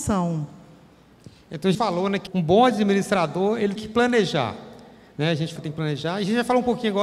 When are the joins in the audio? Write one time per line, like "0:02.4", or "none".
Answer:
0:01.7
0:02.3
0:03.8
0:05.6